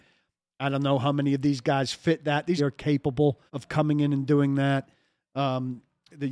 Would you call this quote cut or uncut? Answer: cut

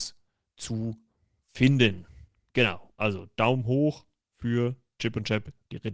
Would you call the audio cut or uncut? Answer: uncut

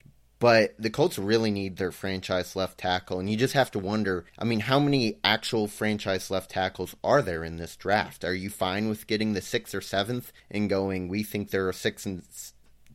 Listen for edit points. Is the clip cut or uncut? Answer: cut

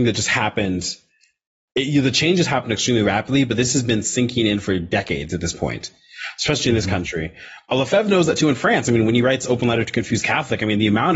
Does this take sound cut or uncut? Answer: uncut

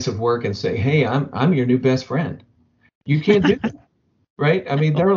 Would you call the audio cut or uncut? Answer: uncut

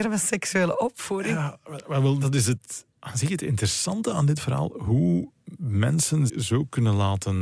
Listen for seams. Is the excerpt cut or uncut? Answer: cut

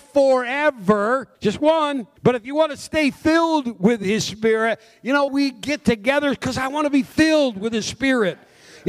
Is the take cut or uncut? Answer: cut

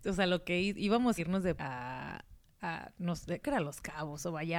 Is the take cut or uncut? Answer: cut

